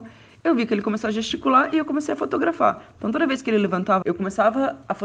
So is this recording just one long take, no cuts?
no; 1 cut; at 4.0 s

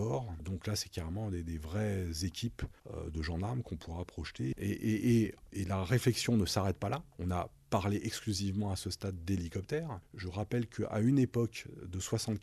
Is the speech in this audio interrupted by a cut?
no; 0 cuts

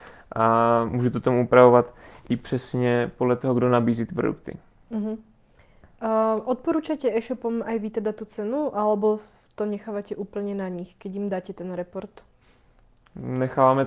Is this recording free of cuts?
yes; 0 cuts

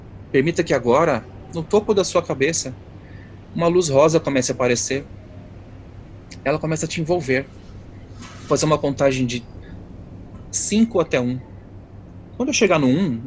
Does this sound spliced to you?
no; 0 cuts

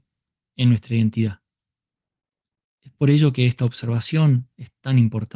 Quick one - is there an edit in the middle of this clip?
no; 0 cuts

